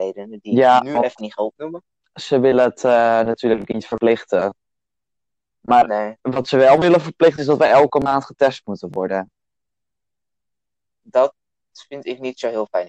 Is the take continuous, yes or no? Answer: yes